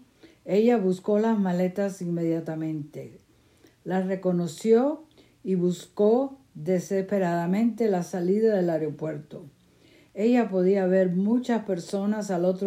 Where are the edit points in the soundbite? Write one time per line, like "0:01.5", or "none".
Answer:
none